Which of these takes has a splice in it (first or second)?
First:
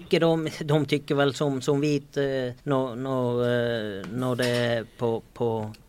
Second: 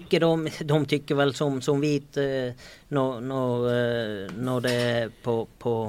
first